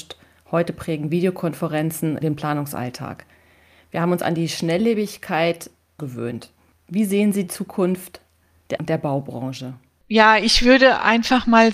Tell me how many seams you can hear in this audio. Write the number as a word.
four